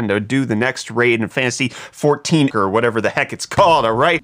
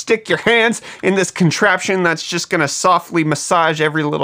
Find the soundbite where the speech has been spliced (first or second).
first